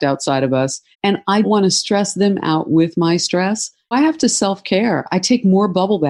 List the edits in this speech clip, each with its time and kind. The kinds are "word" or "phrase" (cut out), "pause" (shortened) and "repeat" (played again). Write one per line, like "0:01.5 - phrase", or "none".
0:00.9 - pause
0:01.4 - word
0:03.9 - word